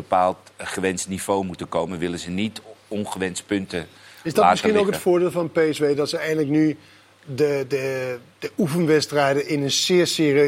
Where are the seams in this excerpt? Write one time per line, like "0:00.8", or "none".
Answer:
none